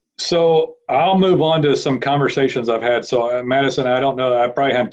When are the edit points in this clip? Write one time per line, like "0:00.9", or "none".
none

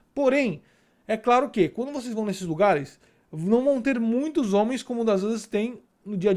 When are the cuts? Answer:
none

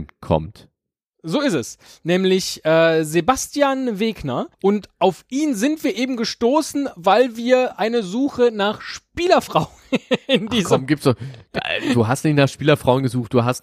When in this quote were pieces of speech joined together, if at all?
0:04.5

